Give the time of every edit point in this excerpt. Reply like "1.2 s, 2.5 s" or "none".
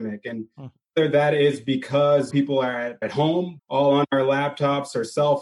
2.3 s, 3.0 s, 3.6 s